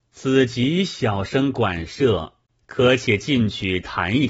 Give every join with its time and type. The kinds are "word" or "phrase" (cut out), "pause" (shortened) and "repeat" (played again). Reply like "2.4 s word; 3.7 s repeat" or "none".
2.5 s pause

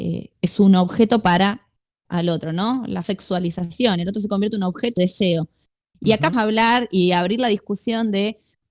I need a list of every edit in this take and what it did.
2.1 s word; 3.0 s word; 5.0 s word; 6.3 s word

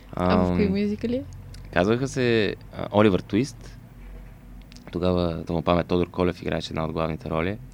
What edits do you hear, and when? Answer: 5.5 s word

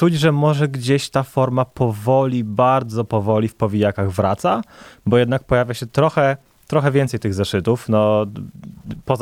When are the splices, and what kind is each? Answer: none

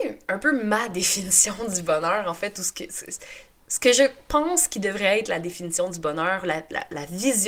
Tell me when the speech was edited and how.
none

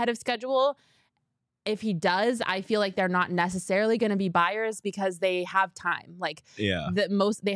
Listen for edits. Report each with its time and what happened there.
none

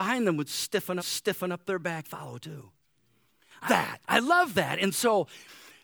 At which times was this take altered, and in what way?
1.0 s repeat; 2.0 s word; 3.7 s word; 4.0 s pause; 4.9 s phrase

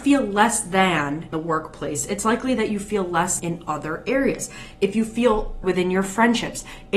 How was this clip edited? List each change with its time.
1.3 s word; 3.4 s word; 5.6 s word

